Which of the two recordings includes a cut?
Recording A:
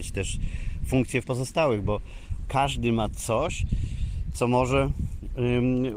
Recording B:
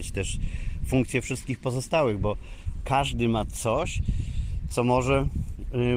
A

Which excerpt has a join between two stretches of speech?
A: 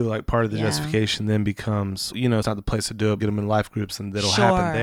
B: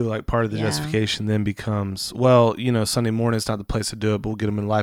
A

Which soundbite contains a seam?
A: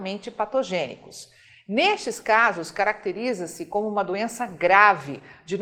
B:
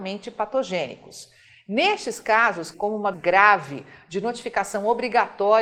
B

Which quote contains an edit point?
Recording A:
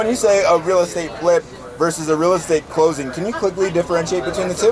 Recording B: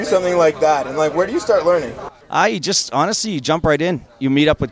B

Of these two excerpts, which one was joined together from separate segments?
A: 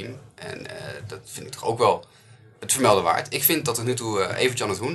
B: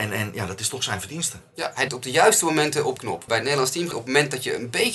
B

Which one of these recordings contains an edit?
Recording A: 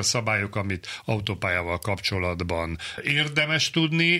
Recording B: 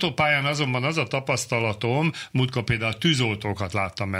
A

